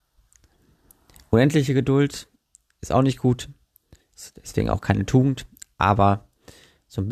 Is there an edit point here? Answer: no; 0 cuts

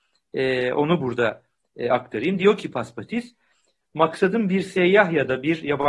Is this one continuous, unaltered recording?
yes; 0 cuts

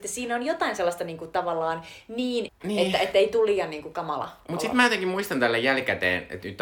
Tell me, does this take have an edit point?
yes; 1 cut; at 2.5 s

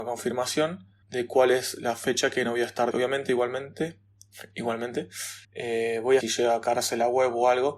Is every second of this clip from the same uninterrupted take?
no; 4 cuts; at 1.0 s, 2.9 s, 5.4 s, 6.2 s

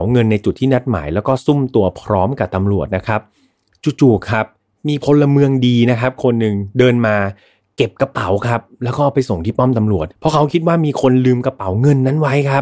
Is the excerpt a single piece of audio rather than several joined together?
no; 1 cut; at 10.1 s

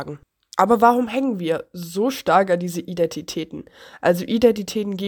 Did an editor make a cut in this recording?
no; 0 cuts

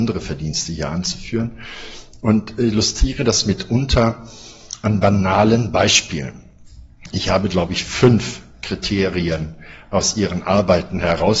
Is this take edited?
no; 0 cuts

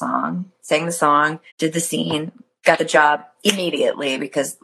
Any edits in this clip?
yes; 1 cut; at 1.5 s

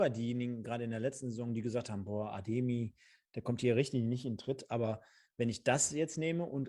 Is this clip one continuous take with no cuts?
yes; 0 cuts

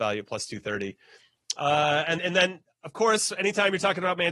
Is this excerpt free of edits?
no; 1 cut; at 2.2 s

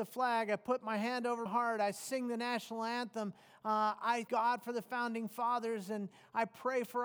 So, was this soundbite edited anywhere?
yes; 2 cuts; at 1.5 s, 4.3 s

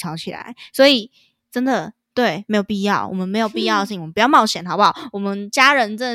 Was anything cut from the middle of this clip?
no; 0 cuts

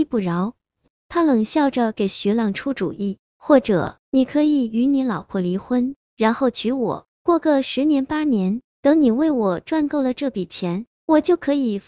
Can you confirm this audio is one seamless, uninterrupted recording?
no; 2 cuts; at 4.0 s, 7.1 s

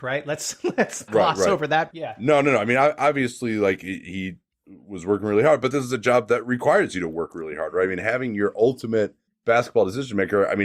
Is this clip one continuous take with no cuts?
no; 2 cuts; at 1.1 s, 1.9 s

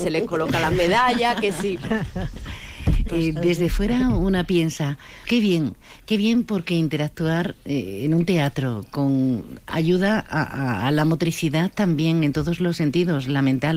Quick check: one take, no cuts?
no; 2 cuts; at 3.1 s, 5.2 s

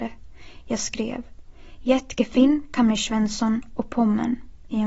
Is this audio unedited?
yes; 0 cuts

